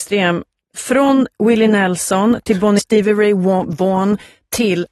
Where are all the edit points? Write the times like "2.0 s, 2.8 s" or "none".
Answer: 2.8 s